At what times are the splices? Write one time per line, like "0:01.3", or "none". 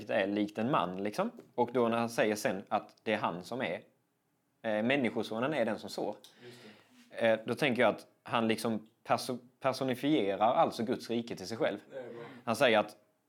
none